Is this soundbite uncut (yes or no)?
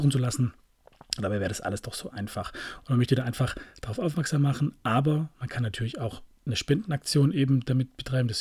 yes